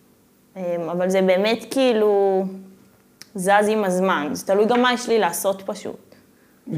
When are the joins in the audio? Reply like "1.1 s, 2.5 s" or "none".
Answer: none